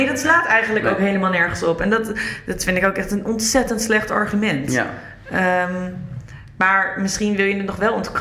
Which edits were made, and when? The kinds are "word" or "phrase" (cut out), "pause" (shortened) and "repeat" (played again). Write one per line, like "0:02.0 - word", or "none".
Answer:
none